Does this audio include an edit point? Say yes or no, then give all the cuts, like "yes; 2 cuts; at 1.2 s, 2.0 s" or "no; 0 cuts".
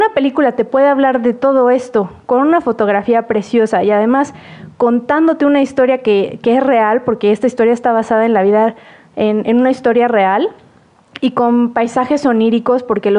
no; 0 cuts